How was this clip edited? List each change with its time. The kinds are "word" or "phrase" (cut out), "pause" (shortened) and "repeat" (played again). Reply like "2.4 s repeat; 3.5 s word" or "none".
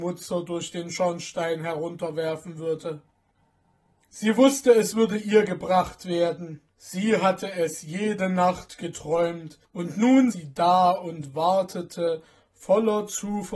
3.3 s pause; 6.7 s pause; 9.6 s pause; 10.3 s word